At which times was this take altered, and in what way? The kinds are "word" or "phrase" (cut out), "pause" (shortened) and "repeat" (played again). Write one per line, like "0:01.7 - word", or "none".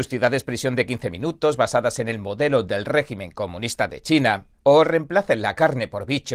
0:04.6 - pause